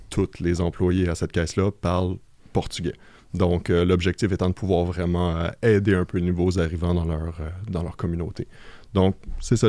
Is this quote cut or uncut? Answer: uncut